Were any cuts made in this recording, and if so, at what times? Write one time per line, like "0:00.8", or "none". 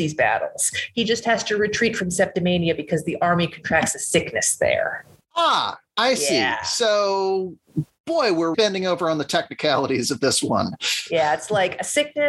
0:08.5